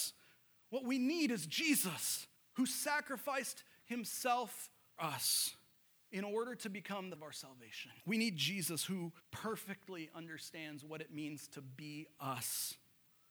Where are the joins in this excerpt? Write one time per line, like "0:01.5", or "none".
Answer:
0:02.4
0:05.0
0:05.8
0:07.2
0:08.0
0:09.2